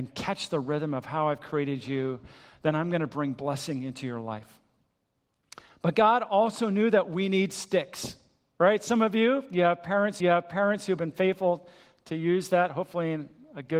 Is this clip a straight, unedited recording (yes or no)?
no